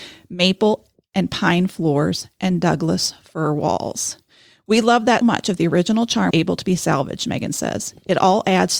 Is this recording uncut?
no; 2 cuts; at 5.2 s, 6.3 s

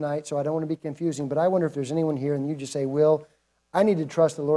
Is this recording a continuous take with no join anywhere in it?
yes; 0 cuts

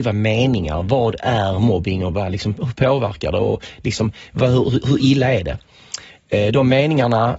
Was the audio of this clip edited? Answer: no; 0 cuts

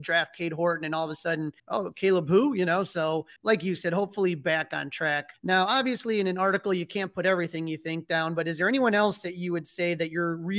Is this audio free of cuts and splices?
no; 3 cuts; at 1.6 s, 3.4 s, 5.3 s

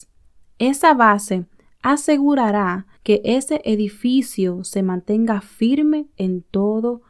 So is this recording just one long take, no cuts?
no; 1 cut; at 3.0 s

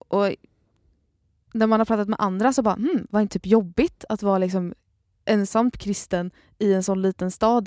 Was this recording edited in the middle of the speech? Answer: yes; 2 cuts; at 3.3 s, 5.7 s

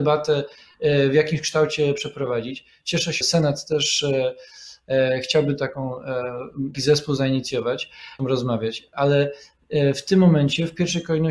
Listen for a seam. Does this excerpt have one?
yes; 3 cuts; at 3.2 s, 6.7 s, 8.2 s

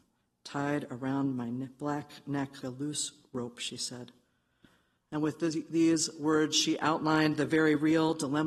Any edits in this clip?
yes; 1 cut; at 2.6 s

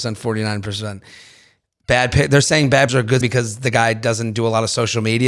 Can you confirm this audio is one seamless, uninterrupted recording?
no; 2 cuts; at 2.9 s, 3.2 s

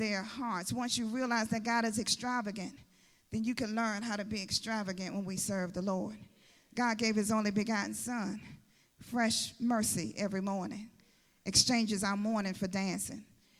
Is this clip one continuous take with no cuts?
yes; 0 cuts

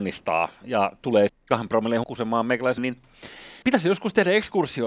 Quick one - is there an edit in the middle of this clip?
yes; 4 cuts; at 1.3 s, 2.0 s, 2.8 s, 3.6 s

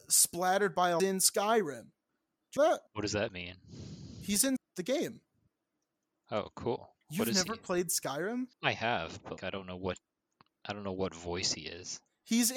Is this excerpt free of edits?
no; 8 cuts; at 1.0 s, 2.1 s, 2.6 s, 2.9 s, 4.6 s, 7.0 s, 8.5 s, 9.4 s

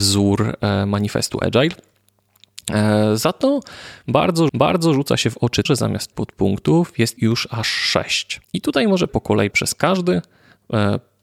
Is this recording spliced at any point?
yes; 7 cuts; at 4.5 s, 5.7 s, 6.1 s, 7.2 s, 8.4 s, 9.1 s, 9.5 s

